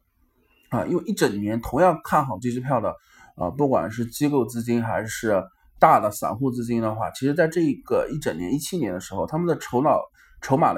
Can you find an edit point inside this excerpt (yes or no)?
yes